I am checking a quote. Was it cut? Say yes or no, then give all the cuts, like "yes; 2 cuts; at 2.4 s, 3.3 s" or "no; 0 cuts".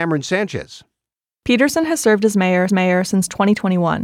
yes; 1 cut; at 2.7 s